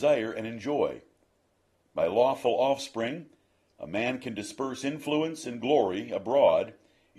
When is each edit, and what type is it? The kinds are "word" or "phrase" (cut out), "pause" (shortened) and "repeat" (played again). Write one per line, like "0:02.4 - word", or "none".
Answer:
none